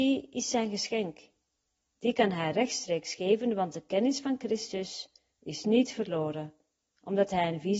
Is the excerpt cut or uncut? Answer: uncut